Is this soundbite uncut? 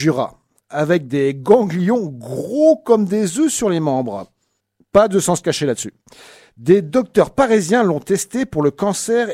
yes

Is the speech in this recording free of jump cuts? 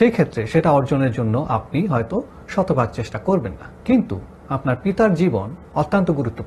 no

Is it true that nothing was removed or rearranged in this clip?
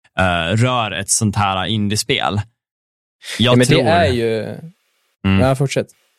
yes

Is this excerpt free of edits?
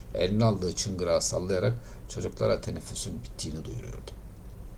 yes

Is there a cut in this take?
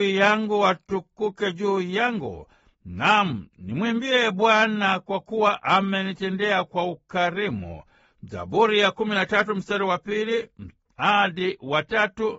no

